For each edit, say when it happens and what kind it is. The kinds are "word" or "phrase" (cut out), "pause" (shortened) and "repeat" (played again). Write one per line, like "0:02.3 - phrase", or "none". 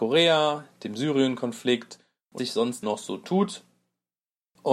0:02.4 - word
0:02.8 - word